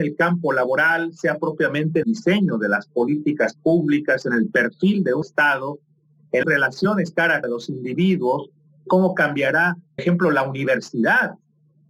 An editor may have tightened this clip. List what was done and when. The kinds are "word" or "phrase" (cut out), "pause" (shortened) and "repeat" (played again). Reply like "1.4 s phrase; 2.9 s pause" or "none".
2.0 s word; 5.2 s word; 6.4 s word; 7.4 s word; 10.0 s word